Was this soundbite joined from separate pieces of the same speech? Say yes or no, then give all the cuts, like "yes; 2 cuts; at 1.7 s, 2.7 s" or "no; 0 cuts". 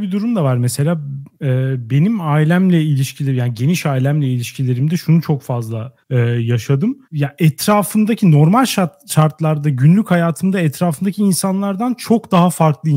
yes; 2 cuts; at 6.0 s, 7.0 s